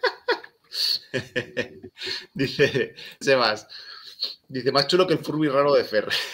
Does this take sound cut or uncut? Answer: cut